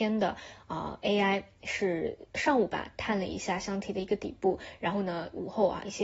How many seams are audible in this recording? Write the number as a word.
zero